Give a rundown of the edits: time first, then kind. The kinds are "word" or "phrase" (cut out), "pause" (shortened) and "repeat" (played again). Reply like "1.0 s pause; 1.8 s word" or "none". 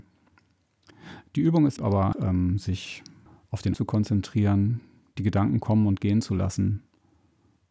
1.8 s phrase; 2.1 s word; 3.3 s pause; 3.7 s word